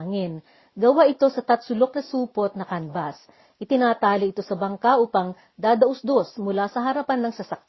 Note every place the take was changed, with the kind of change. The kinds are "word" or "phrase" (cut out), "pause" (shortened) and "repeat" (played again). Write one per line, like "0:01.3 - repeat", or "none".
none